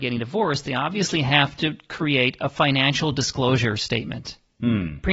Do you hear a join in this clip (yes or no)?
no